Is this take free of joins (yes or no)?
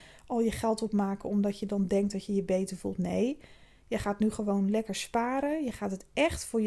yes